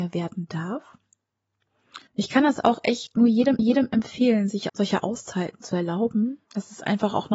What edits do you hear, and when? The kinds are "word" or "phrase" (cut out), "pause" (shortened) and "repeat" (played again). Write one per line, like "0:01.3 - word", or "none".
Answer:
0:02.1 - pause
0:03.6 - repeat
0:04.7 - word
0:06.4 - pause